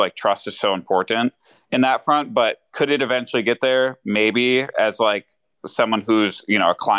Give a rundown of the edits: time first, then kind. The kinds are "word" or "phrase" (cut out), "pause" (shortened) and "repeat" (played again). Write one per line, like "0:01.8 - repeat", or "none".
none

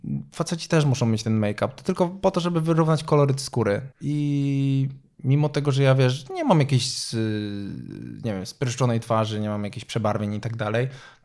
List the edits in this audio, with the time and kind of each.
0:03.9 - pause

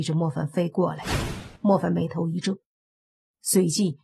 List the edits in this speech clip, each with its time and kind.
0:01.6 - pause

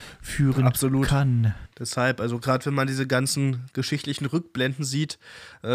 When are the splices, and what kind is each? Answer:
0:01.7 - pause

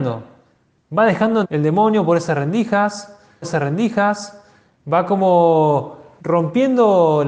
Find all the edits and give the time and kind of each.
0:01.4 - word
0:03.4 - repeat
0:06.2 - word

